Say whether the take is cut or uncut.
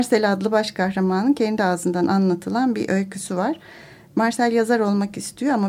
uncut